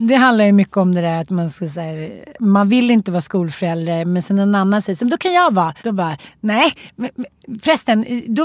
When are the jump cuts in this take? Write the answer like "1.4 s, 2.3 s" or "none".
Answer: 2.4 s, 5.8 s